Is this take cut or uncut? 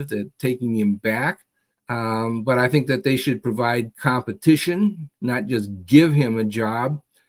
cut